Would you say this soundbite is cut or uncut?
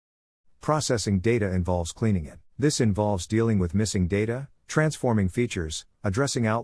cut